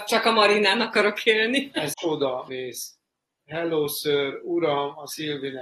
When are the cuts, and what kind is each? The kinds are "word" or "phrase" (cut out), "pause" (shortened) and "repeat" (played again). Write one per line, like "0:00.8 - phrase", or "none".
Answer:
0:01.9 - phrase
0:02.5 - phrase

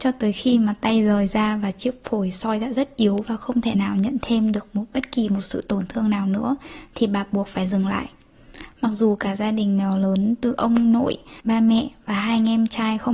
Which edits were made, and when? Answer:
0:11.4 - pause

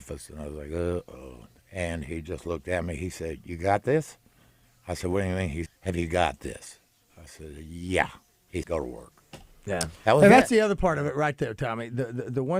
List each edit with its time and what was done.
0:05.7 - word
0:08.6 - word

